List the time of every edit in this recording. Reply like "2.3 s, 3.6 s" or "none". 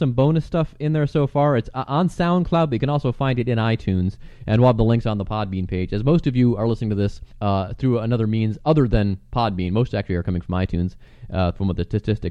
7.3 s